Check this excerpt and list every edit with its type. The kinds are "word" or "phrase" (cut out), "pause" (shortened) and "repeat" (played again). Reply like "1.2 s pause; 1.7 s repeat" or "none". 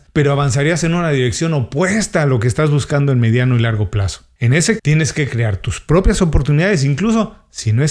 4.8 s word